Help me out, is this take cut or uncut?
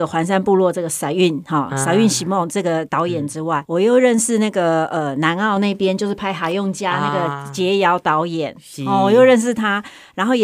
cut